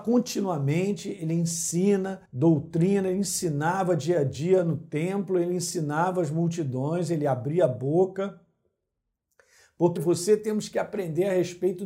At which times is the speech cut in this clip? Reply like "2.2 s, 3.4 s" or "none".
2.2 s, 10.0 s